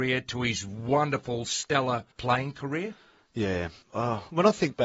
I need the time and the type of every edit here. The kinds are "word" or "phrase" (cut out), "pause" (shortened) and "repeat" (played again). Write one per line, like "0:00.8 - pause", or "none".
0:02.1 - pause
0:03.8 - pause